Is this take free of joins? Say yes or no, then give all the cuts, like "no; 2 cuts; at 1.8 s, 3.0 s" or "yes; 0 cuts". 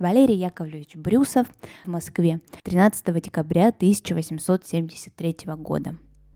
no; 2 cuts; at 1.8 s, 2.6 s